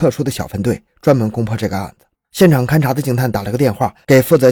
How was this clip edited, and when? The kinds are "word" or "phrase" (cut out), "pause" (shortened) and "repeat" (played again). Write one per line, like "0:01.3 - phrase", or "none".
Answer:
0:02.1 - pause

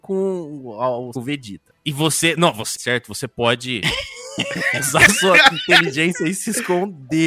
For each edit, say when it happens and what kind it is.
0:01.1 - phrase
0:02.7 - phrase

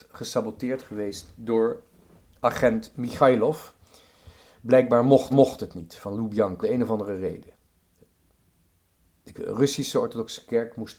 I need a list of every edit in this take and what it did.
0:05.3 - repeat
0:06.6 - word

